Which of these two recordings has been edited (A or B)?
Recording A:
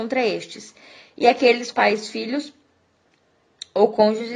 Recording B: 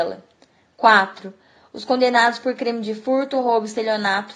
A